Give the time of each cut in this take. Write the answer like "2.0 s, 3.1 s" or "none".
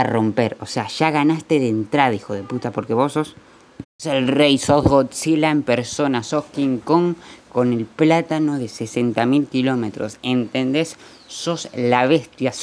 3.9 s